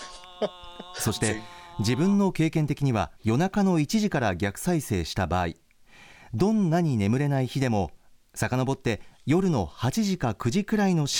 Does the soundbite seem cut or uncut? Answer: cut